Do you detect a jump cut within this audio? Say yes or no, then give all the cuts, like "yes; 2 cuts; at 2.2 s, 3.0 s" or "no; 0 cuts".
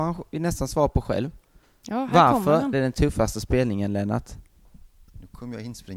yes; 1 cut; at 2.7 s